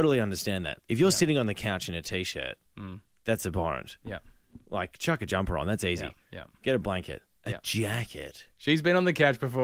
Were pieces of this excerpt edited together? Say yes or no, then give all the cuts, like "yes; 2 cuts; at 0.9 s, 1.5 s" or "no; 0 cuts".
yes; 2 cuts; at 2.7 s, 8.5 s